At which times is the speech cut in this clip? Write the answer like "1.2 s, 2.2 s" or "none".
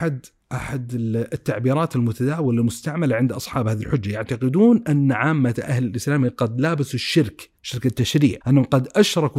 7.6 s, 8.4 s